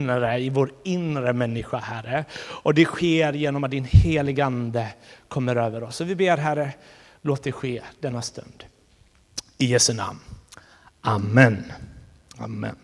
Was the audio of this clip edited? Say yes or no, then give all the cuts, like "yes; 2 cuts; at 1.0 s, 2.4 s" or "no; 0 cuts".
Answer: no; 0 cuts